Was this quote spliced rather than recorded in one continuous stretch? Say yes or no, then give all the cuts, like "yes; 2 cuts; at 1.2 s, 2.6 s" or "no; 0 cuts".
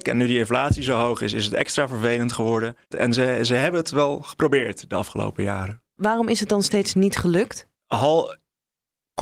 yes; 2 cuts; at 2.8 s, 7.7 s